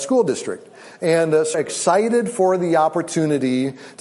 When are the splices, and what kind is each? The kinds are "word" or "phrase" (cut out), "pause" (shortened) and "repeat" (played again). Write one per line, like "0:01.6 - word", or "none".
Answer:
0:01.5 - word